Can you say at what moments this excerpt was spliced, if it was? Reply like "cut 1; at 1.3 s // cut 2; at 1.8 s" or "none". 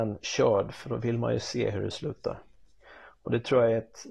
none